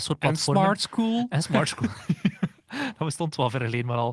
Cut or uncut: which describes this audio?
uncut